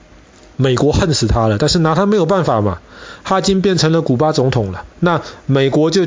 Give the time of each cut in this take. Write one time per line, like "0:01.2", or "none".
0:04.9